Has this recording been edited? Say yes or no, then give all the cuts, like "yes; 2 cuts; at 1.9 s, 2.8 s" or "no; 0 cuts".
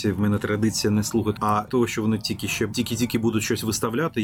yes; 3 cuts; at 1.4 s, 1.7 s, 2.7 s